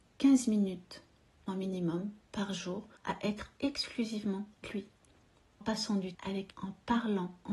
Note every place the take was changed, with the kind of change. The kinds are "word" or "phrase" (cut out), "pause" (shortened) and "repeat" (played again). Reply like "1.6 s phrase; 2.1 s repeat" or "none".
1.5 s phrase; 3.0 s pause; 4.6 s word; 5.6 s word; 6.1 s word; 6.5 s word